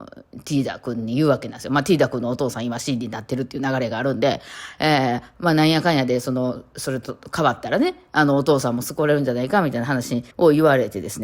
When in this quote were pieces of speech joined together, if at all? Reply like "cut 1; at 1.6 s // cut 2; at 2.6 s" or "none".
cut 1; at 10.3 s